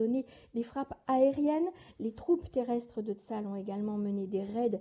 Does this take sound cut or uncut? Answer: uncut